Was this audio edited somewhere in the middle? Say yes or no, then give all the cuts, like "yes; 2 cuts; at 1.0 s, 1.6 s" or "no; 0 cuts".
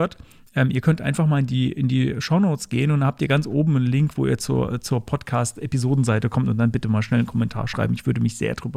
no; 0 cuts